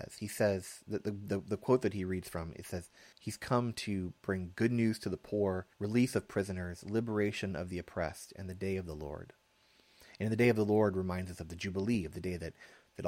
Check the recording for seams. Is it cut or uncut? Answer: cut